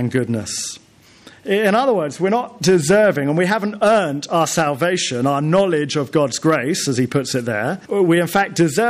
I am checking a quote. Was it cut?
yes; 1 cut; at 7.8 s

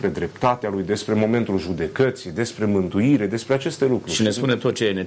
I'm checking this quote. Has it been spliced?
no; 0 cuts

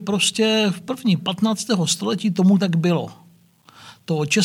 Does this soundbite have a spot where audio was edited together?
yes; 1 cut; at 1.2 s

